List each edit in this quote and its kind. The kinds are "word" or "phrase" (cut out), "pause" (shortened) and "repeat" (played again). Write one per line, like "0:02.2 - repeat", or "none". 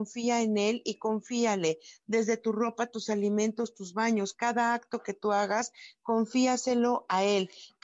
none